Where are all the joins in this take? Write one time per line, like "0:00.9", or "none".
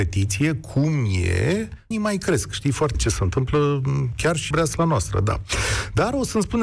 0:01.9
0:02.9
0:04.5